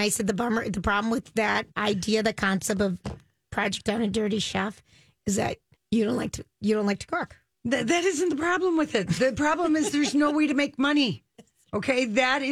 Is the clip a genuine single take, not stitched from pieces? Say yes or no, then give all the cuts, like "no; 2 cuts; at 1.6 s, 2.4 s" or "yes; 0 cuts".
no; 2 cuts; at 1.7 s, 5.7 s